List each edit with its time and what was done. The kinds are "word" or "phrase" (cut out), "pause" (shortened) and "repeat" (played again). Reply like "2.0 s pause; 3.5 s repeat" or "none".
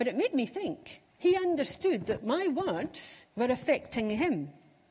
1.1 s pause; 3.3 s pause

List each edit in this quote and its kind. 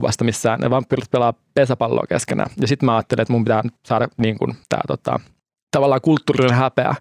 3.8 s pause; 4.6 s pause; 5.4 s pause

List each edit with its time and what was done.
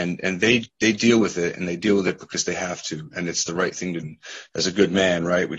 4.0 s word

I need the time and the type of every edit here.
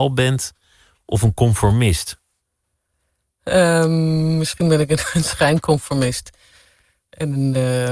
none

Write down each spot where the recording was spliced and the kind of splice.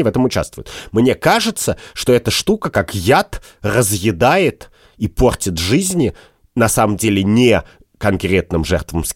none

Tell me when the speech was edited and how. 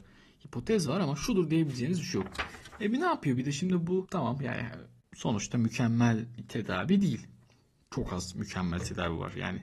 none

